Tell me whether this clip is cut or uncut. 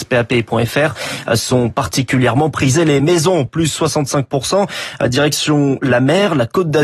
uncut